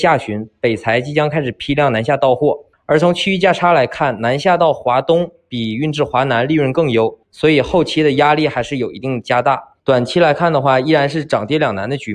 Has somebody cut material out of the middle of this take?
yes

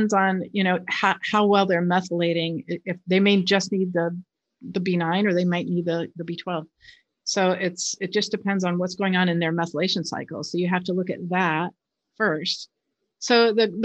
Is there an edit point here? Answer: no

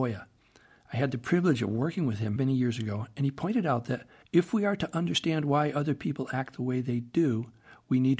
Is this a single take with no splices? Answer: no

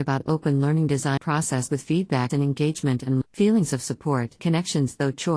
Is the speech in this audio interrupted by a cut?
yes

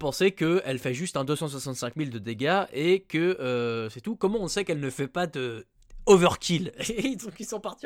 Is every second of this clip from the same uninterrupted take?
yes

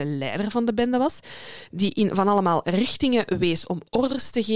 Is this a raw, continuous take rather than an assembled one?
yes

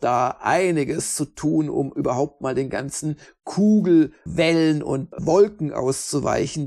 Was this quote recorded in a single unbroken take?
yes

